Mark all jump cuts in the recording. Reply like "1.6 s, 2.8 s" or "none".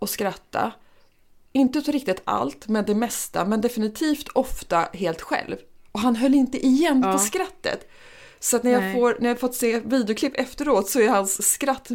none